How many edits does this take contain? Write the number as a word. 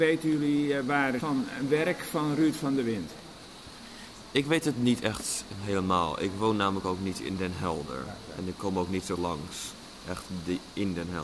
two